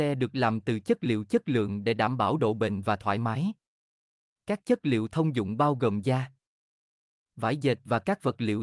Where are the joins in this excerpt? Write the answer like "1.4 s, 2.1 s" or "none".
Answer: none